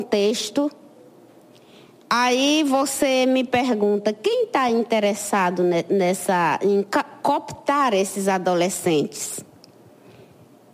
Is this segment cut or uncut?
uncut